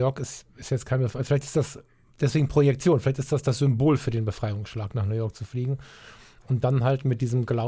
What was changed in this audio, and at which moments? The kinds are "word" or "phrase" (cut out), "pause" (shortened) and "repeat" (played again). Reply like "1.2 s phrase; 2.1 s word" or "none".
none

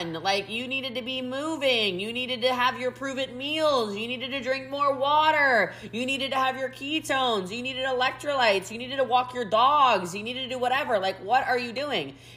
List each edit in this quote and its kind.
none

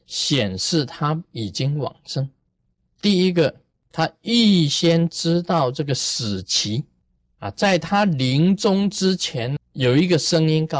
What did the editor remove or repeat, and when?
9.6 s word

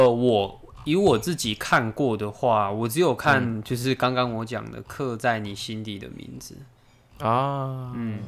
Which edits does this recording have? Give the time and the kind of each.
none

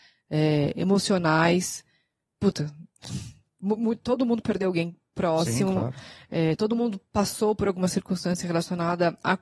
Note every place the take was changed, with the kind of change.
none

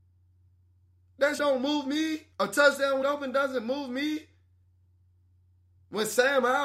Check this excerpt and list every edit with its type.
1.4 s word; 2.3 s pause; 3.0 s phrase

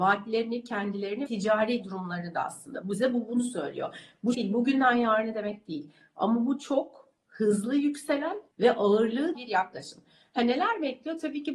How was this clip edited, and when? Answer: 1.3 s word; 4.3 s phrase; 8.5 s pause; 9.3 s phrase

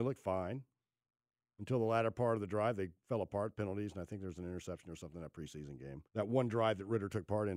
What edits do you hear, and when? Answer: 6.1 s pause

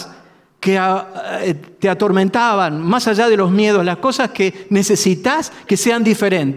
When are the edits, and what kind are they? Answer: none

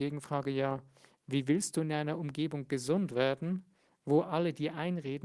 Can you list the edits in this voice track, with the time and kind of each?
none

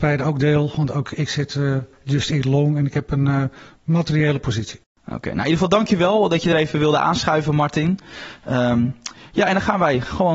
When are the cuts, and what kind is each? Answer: none

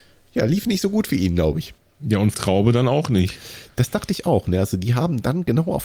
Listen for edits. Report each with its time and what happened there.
1.8 s pause; 2.3 s word

